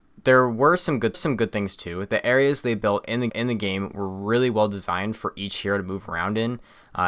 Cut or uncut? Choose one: cut